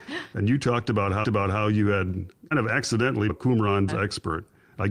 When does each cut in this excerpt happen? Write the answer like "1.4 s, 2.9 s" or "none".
1.2 s, 2.5 s, 3.3 s, 3.9 s